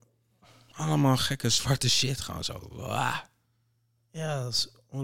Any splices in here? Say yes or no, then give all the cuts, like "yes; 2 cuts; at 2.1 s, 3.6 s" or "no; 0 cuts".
no; 0 cuts